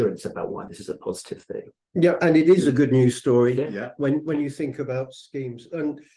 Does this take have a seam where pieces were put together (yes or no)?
yes